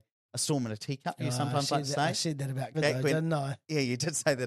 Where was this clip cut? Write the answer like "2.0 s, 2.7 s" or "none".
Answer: 2.7 s